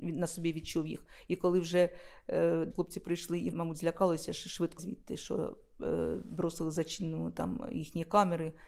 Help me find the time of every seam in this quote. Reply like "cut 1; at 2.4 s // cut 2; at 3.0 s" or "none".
cut 1; at 2.7 s // cut 2; at 3.5 s // cut 3; at 4.8 s